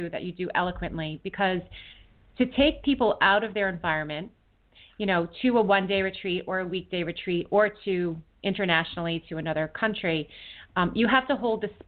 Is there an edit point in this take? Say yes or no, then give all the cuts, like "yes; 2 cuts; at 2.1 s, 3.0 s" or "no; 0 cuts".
no; 0 cuts